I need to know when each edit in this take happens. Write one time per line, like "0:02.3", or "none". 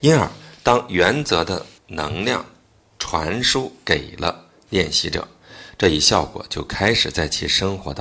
0:01.8